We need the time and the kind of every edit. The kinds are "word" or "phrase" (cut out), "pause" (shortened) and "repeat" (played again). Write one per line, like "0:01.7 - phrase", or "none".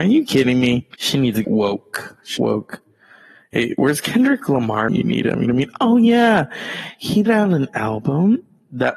0:00.9 - pause
0:01.4 - word
0:02.4 - phrase
0:04.9 - word
0:05.4 - phrase
0:07.3 - word